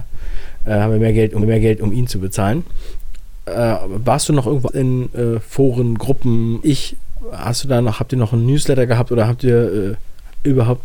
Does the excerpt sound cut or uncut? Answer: cut